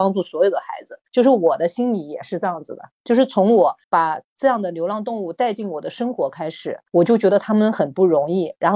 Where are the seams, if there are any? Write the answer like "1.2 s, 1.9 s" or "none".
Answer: 6.9 s